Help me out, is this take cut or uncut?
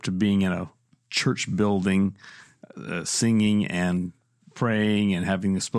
uncut